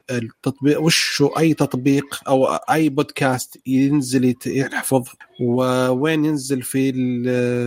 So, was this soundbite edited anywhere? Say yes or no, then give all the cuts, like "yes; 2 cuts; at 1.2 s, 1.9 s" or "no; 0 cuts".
no; 0 cuts